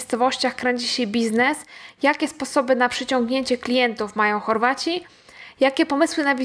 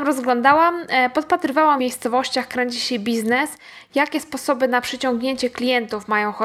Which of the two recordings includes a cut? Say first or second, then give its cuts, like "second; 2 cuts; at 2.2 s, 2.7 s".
second; 1 cut; at 1.8 s